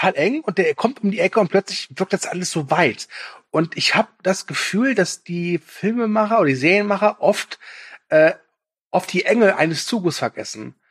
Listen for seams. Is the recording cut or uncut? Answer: uncut